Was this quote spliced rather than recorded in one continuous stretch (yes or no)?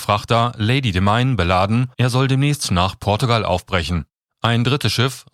yes